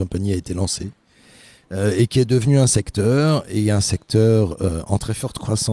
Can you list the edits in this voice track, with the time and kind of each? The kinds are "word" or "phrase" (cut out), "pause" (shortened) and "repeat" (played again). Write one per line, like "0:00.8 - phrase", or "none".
none